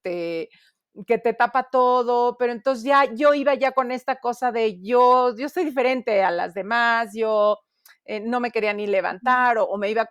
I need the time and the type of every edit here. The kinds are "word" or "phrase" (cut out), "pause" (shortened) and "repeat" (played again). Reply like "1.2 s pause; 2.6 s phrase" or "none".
none

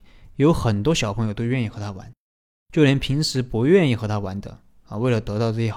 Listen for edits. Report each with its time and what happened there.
none

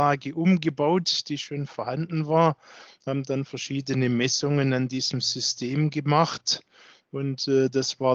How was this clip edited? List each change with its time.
none

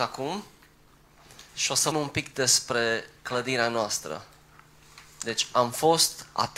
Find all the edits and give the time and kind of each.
1.5 s pause; 1.9 s word

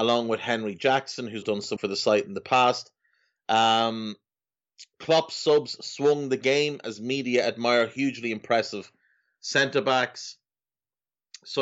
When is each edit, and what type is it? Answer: 1.4 s word; 1.8 s word

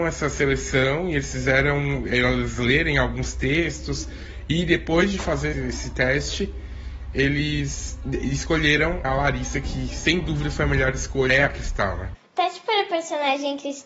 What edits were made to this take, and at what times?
5.5 s word; 9.0 s word; 11.3 s word

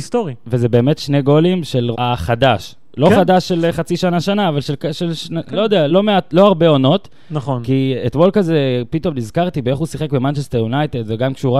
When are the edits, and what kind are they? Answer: 1.9 s word; 5.9 s word

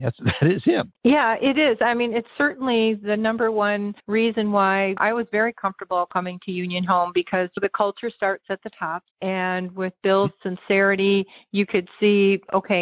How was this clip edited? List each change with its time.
4.0 s pause; 9.1 s pause

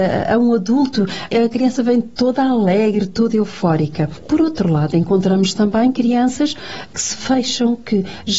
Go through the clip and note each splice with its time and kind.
none

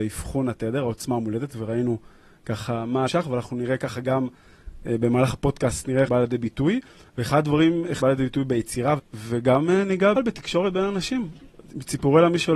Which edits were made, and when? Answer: 3.1 s word; 6.1 s word; 8.0 s word; 9.0 s word; 10.1 s word

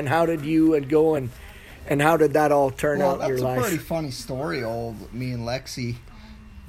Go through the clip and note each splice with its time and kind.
none

